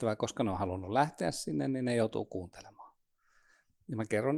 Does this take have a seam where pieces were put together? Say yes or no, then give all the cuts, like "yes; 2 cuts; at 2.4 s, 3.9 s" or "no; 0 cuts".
no; 0 cuts